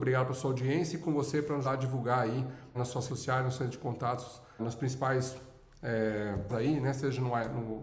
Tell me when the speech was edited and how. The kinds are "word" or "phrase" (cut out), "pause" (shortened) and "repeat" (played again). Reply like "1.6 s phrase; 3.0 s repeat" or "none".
1.0 s word; 1.6 s word; 2.7 s word; 3.1 s word; 4.6 s word; 6.5 s word